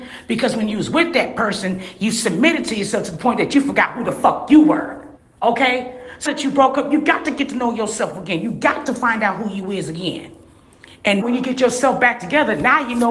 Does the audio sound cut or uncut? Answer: cut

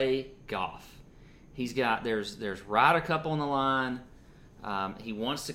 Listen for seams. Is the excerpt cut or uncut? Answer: uncut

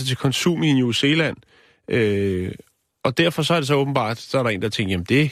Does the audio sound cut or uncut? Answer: uncut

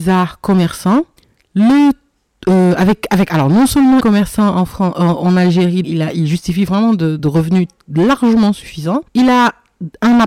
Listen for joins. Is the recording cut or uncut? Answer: cut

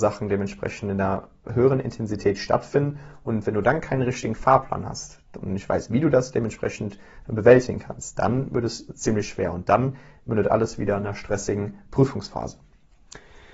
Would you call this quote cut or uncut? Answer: uncut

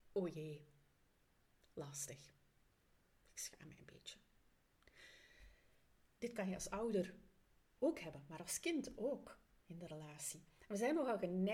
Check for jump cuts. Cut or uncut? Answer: uncut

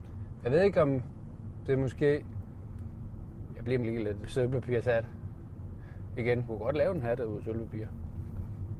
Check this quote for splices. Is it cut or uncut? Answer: cut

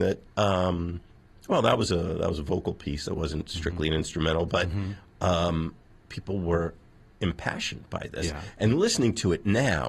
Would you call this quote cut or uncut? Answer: uncut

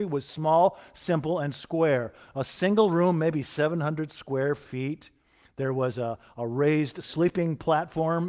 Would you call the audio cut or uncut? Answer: uncut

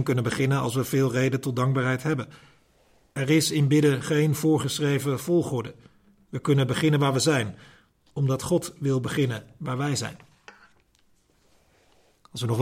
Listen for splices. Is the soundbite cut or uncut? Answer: cut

